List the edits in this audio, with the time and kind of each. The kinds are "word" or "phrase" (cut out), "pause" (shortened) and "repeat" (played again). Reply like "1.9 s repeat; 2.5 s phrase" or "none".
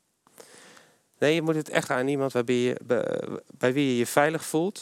1.9 s word